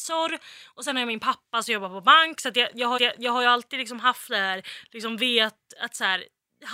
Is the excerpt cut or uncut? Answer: cut